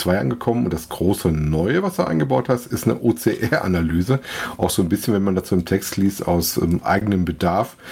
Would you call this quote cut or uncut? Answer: uncut